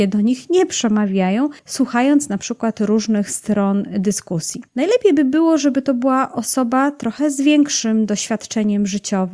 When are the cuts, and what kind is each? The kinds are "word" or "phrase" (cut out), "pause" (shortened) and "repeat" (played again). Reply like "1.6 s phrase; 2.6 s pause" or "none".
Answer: 1.6 s pause; 4.7 s pause